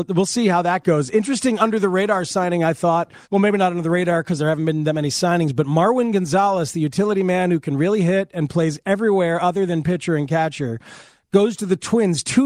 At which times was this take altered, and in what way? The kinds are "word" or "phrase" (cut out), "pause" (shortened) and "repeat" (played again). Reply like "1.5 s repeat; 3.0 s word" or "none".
3.2 s pause